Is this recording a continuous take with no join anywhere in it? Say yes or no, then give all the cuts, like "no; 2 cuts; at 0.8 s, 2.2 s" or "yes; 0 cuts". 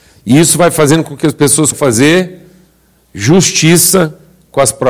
no; 1 cut; at 1.7 s